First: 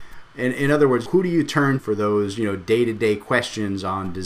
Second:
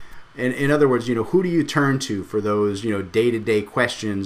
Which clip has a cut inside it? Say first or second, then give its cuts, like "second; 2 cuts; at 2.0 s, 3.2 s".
first; 2 cuts; at 1.1 s, 1.8 s